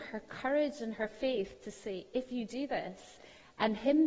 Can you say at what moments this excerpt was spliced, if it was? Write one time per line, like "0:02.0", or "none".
none